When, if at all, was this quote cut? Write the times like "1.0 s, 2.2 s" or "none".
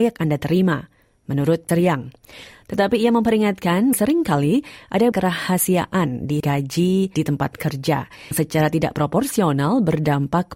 1.7 s, 3.9 s, 5.1 s, 6.4 s, 7.1 s, 8.3 s